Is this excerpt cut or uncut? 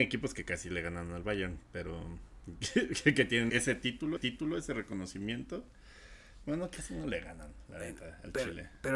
cut